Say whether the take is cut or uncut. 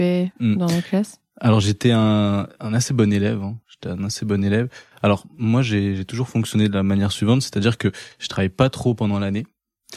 uncut